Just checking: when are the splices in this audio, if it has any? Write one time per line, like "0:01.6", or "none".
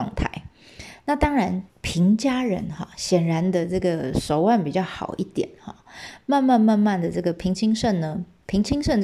0:01.7